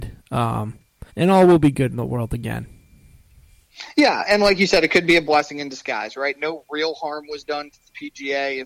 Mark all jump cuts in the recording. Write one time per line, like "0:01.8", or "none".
0:01.1
0:04.3